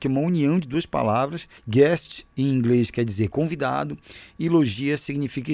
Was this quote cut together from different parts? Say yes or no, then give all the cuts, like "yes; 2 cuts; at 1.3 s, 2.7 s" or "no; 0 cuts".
yes; 1 cut; at 1.6 s